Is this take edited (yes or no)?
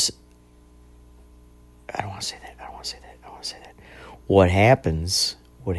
no